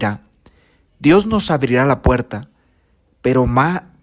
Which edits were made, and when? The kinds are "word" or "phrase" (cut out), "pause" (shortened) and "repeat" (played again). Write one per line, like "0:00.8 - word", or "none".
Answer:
none